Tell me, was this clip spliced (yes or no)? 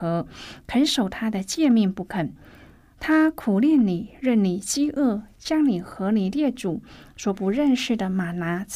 no